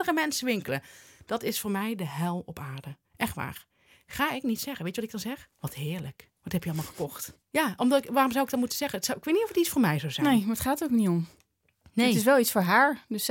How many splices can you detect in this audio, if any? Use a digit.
3